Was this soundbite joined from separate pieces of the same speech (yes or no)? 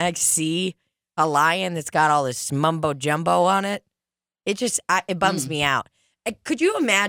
no